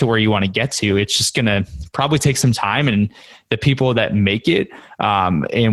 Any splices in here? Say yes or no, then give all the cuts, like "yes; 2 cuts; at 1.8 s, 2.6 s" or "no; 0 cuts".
no; 0 cuts